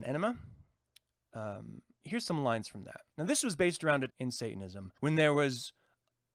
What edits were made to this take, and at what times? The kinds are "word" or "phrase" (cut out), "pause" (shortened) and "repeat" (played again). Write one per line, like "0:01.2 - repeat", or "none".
0:02.0 - word
0:03.1 - pause
0:04.1 - word
0:05.0 - pause